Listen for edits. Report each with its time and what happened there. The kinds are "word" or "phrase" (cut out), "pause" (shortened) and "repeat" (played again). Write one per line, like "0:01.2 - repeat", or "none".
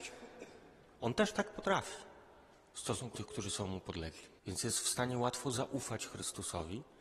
0:03.1 - word
0:04.4 - pause